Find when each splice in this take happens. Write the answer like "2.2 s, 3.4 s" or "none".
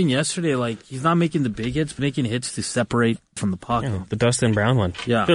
2.0 s, 3.4 s